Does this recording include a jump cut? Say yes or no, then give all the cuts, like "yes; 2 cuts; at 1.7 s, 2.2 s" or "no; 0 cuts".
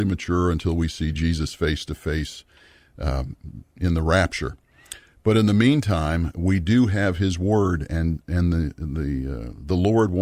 no; 0 cuts